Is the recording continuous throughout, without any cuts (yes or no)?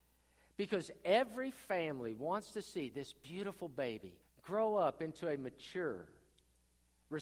no